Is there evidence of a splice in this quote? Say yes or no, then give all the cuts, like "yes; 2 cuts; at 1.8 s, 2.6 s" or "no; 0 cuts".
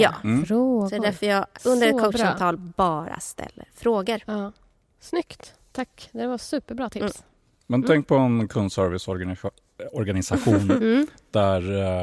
yes; 1 cut; at 1.6 s